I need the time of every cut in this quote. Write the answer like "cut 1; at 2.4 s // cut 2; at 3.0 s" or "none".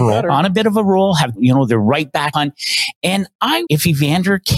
cut 1; at 1.4 s // cut 2; at 2.3 s // cut 3; at 3.7 s